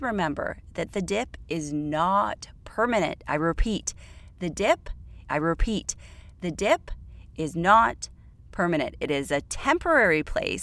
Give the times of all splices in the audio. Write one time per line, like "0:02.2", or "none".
0:05.3